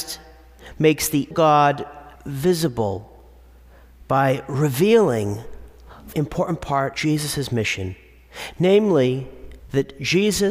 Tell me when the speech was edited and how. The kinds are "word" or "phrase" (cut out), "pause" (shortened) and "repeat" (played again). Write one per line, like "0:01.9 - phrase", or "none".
0:01.3 - word
0:02.2 - pause
0:06.1 - word
0:06.9 - word
0:09.6 - pause